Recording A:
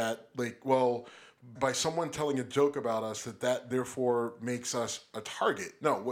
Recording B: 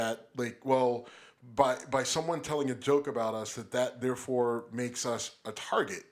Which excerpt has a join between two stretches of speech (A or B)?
A